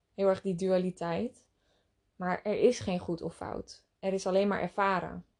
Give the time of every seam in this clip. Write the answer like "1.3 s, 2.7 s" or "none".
none